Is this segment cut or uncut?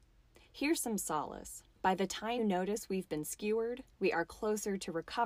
cut